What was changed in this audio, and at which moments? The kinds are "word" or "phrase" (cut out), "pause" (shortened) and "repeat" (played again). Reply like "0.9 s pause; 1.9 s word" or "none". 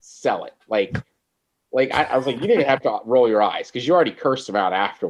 none